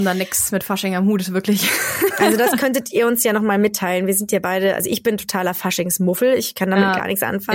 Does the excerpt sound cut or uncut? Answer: uncut